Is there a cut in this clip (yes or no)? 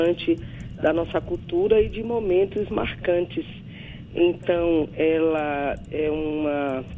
no